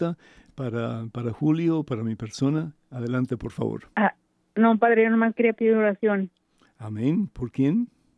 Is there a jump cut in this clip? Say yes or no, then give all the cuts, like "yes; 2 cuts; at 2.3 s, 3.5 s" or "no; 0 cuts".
yes; 1 cut; at 4.2 s